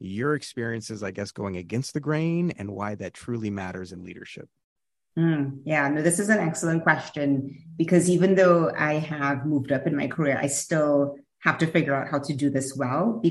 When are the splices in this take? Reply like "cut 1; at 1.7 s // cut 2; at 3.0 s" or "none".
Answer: none